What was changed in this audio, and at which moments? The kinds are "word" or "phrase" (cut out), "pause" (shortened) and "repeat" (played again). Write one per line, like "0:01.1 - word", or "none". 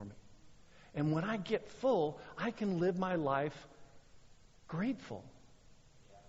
none